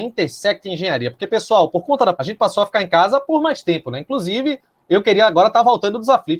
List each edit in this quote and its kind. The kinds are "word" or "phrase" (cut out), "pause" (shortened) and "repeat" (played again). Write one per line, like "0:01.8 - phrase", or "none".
0:02.1 - word

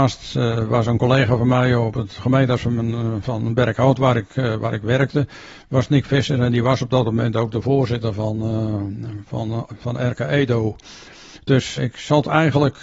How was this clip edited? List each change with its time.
0:11.8 - word

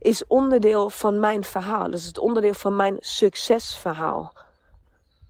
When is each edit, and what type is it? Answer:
none

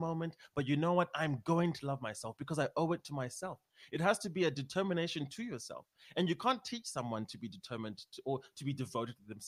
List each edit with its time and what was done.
none

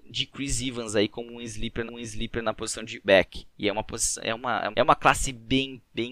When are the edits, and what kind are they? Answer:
0:01.9 - repeat
0:03.0 - word
0:04.7 - word

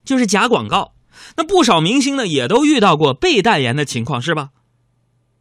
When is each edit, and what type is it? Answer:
none

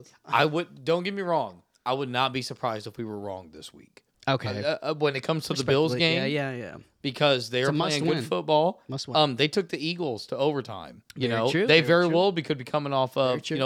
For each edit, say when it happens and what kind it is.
0:04.1 - pause
0:11.1 - pause

